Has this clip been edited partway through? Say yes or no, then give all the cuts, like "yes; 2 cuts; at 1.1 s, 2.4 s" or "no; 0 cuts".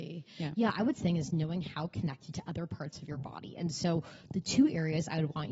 yes; 2 cuts; at 1.0 s, 2.3 s